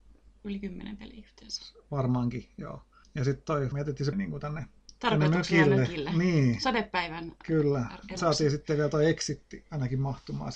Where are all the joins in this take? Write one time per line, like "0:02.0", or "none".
0:03.0
0:03.7
0:04.1
0:05.0
0:08.2